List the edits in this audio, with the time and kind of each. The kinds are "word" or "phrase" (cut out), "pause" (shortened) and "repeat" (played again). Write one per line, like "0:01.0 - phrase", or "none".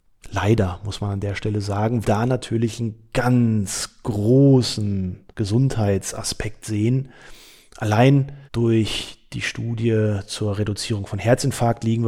0:02.0 - phrase
0:05.3 - pause
0:08.5 - pause